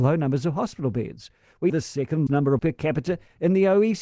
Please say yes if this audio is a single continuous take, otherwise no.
no